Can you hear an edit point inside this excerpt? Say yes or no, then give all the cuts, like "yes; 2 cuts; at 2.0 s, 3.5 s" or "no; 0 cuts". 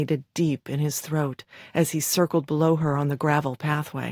no; 0 cuts